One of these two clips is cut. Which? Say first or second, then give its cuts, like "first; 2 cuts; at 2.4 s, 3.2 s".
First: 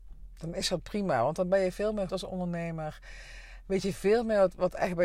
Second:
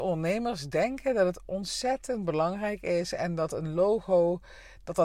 first; 1 cut; at 2.1 s